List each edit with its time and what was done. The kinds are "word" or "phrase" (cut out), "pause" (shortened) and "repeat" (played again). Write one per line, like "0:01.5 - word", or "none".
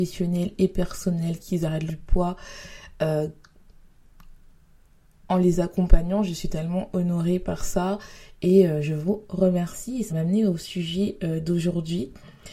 0:01.9 - phrase
0:10.1 - word